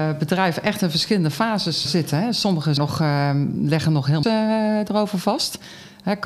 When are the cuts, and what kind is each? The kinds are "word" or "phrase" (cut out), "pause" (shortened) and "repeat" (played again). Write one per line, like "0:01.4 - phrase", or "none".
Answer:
0:01.8 - word
0:02.8 - word
0:04.2 - word